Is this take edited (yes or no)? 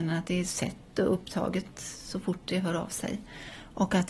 no